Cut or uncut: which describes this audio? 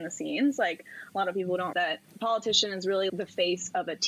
cut